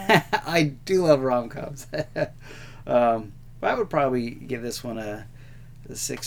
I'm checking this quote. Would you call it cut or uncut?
uncut